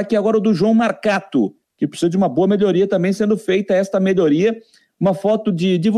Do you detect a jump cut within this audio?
yes; 1 cut; at 1.6 s

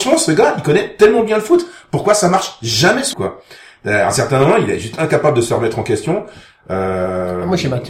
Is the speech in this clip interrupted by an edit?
yes; 1 cut; at 3.1 s

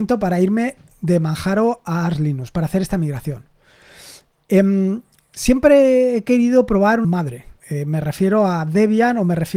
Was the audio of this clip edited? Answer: yes; 2 cuts; at 7.0 s, 7.6 s

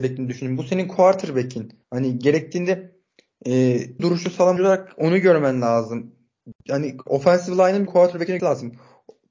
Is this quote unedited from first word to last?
no; 5 cuts; at 1.8 s, 4.0 s, 4.6 s, 7.9 s, 8.4 s

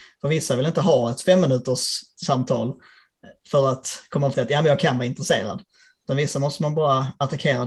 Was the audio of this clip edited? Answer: yes; 1 cut; at 4.3 s

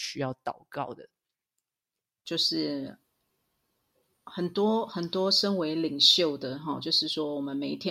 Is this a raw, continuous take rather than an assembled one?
yes; 0 cuts

